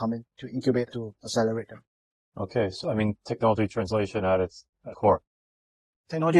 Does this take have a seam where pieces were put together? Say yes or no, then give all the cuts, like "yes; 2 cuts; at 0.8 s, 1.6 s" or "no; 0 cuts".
yes; 3 cuts; at 0.9 s, 2.8 s, 4.9 s